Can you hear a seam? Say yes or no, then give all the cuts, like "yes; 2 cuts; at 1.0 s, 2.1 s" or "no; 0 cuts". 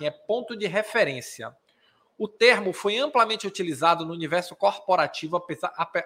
no; 0 cuts